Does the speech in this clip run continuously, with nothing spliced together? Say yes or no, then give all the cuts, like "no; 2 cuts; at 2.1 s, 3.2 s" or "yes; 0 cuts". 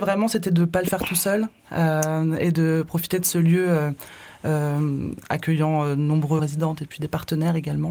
no; 1 cut; at 6.4 s